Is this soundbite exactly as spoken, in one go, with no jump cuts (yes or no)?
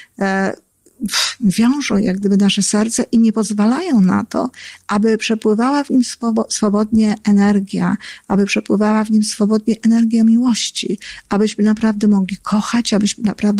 yes